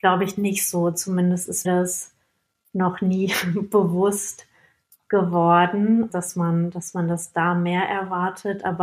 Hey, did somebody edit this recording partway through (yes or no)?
yes